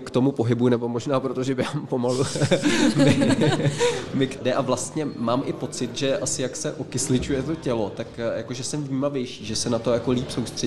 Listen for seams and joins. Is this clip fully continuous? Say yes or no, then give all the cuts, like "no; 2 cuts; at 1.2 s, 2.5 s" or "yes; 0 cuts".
no; 1 cut; at 4.4 s